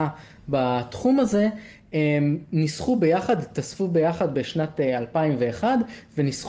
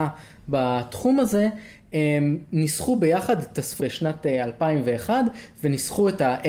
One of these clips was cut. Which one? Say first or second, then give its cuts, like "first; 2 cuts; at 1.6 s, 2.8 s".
second; 1 cut; at 3.8 s